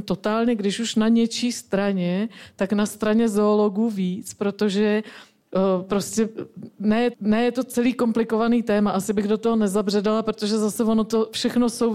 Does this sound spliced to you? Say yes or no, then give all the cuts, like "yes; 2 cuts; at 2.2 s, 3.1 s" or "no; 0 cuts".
yes; 1 cut; at 7.1 s